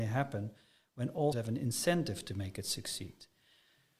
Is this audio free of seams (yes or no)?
no